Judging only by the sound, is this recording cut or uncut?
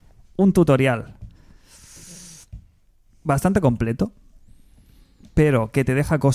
uncut